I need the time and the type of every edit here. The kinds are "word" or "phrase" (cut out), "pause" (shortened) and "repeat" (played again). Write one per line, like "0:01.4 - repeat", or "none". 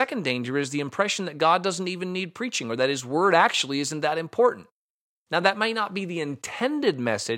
none